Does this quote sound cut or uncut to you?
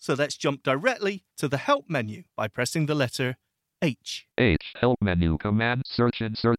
cut